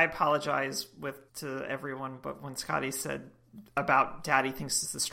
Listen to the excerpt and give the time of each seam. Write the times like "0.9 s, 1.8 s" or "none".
1.3 s, 3.7 s